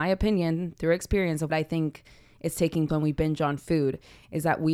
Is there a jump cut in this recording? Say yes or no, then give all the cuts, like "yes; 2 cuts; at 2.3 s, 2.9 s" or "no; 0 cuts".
yes; 2 cuts; at 1.5 s, 2.9 s